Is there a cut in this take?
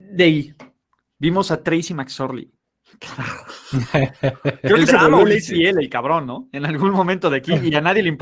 no; 0 cuts

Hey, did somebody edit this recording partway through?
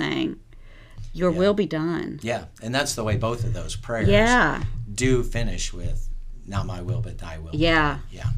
no; 0 cuts

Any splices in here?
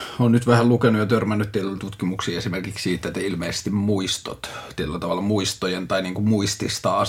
yes; 1 cut; at 1.8 s

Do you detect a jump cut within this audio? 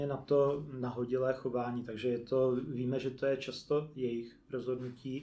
no; 0 cuts

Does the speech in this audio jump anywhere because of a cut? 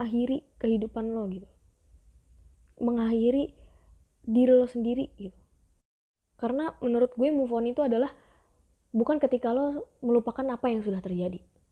no; 0 cuts

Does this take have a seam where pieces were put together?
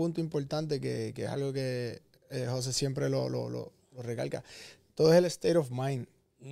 no; 0 cuts

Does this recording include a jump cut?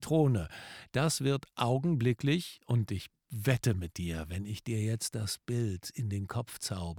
no; 0 cuts

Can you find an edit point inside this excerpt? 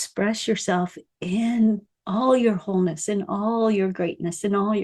no; 0 cuts

